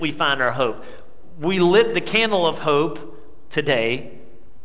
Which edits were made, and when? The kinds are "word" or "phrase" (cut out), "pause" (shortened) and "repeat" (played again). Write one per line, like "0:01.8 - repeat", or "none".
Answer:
none